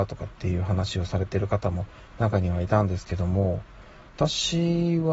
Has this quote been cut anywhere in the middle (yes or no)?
no